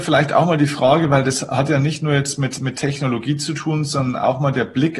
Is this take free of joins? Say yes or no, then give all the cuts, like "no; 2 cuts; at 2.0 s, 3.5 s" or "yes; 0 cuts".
yes; 0 cuts